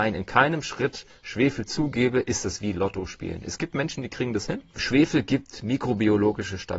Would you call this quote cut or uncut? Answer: uncut